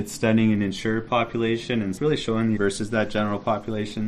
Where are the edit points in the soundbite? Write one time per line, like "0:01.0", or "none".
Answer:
0:02.6